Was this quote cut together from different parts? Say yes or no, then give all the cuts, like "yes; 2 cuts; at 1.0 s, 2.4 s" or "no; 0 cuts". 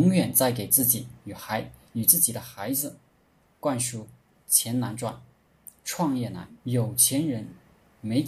yes; 2 cuts; at 3.4 s, 6.6 s